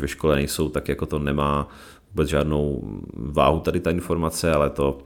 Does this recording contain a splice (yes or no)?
no